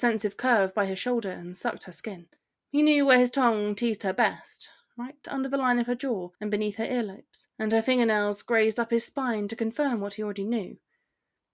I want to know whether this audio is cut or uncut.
cut